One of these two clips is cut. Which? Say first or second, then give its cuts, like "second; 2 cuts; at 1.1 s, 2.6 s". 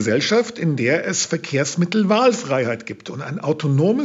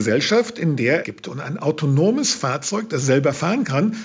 second; 1 cut; at 1.0 s